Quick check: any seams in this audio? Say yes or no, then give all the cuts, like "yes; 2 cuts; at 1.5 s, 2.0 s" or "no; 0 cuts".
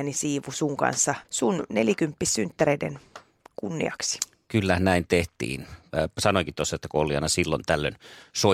yes; 1 cut; at 1.2 s